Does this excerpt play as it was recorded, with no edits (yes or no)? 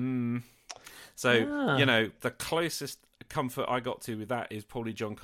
yes